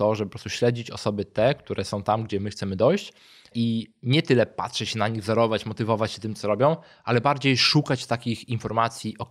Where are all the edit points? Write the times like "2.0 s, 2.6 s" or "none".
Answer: none